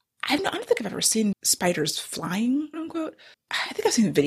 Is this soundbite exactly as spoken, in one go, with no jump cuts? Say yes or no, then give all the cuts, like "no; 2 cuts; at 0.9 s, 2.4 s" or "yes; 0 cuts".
no; 3 cuts; at 1.3 s, 2.7 s, 3.3 s